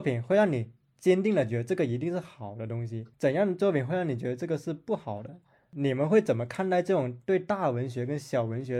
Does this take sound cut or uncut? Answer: cut